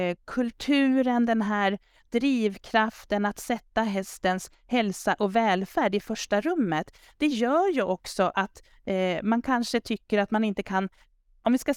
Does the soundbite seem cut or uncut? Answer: uncut